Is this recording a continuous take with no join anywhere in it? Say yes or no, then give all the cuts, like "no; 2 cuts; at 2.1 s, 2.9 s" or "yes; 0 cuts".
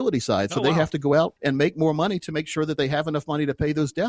no; 1 cut; at 1.4 s